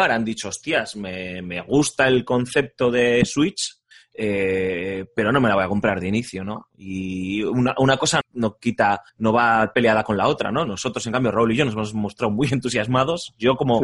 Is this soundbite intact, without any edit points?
no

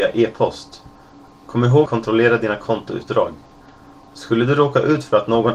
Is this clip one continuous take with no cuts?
no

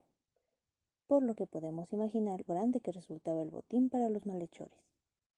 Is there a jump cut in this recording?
yes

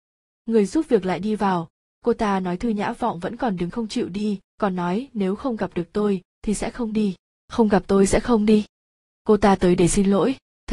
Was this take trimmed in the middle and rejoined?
yes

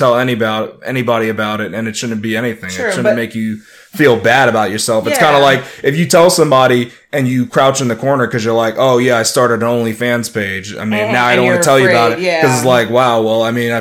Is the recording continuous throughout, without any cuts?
yes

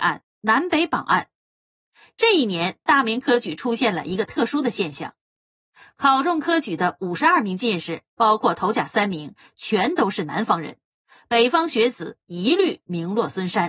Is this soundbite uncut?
yes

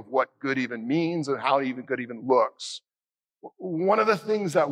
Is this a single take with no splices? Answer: yes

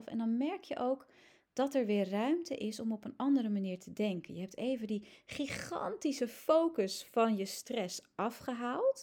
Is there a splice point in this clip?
no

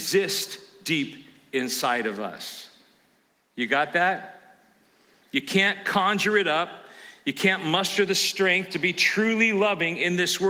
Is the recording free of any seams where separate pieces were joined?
yes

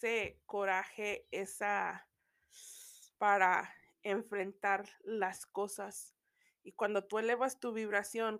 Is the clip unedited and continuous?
no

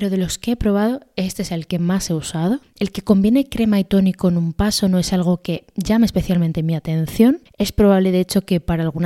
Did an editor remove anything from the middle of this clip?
no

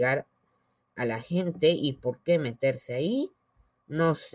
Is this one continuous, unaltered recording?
yes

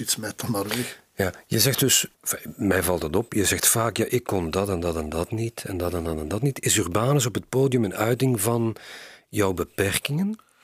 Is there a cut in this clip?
yes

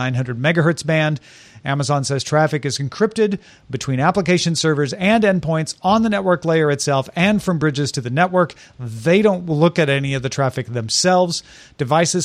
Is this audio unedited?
yes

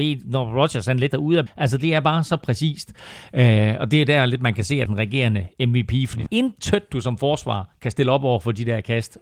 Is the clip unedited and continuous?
no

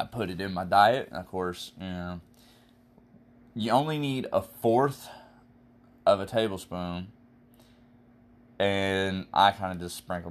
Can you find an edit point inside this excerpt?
no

